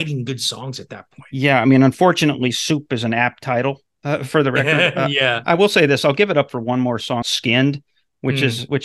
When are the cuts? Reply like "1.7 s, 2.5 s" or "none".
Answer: 7.2 s